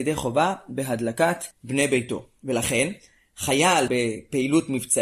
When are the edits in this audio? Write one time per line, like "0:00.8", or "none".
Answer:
0:01.5
0:03.9